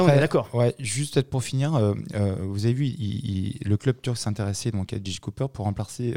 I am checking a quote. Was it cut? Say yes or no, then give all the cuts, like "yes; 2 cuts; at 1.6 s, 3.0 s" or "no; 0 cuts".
no; 0 cuts